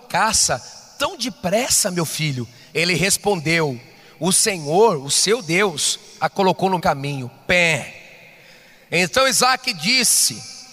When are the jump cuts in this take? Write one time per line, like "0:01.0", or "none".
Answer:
0:06.8